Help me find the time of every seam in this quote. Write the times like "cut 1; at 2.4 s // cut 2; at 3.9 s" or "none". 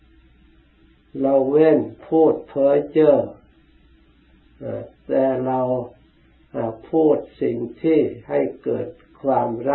cut 1; at 2.0 s